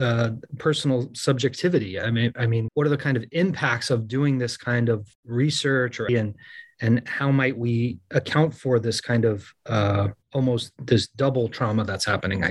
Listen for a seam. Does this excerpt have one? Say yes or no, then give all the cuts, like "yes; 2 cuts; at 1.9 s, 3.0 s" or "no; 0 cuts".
yes; 4 cuts; at 2.7 s, 5.1 s, 6.1 s, 10.2 s